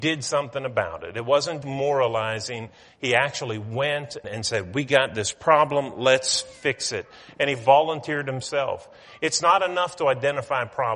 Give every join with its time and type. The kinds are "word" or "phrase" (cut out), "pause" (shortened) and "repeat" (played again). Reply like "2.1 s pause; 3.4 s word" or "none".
1.6 s word; 4.2 s word

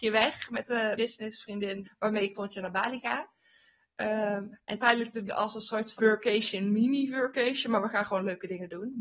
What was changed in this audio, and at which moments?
1.0 s word; 1.8 s word; 2.3 s word; 4.8 s word; 5.3 s word; 6.0 s word

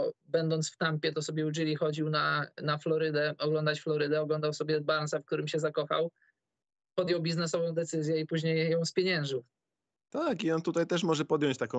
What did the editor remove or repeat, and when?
none

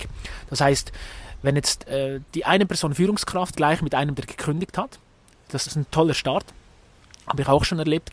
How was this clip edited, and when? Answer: 2.3 s pause; 3.5 s phrase; 5.7 s phrase

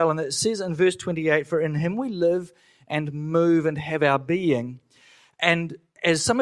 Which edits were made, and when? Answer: none

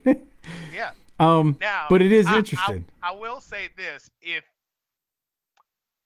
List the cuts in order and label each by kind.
none

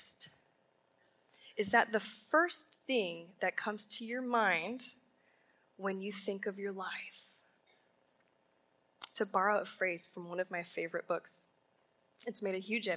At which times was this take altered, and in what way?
none

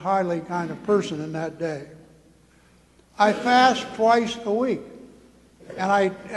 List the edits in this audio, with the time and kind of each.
none

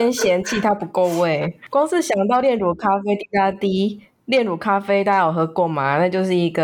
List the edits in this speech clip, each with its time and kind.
none

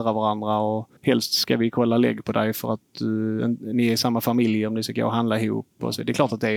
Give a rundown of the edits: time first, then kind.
1.0 s pause

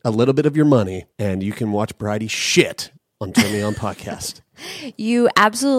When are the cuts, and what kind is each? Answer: 1.1 s pause; 3.0 s pause

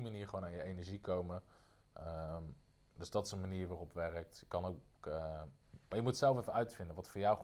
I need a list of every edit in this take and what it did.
none

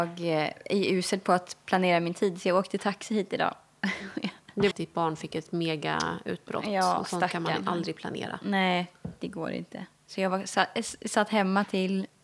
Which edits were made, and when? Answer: 4.7 s phrase

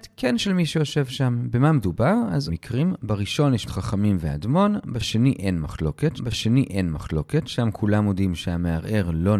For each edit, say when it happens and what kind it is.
2.5 s phrase; 3.7 s word; 6.2 s repeat

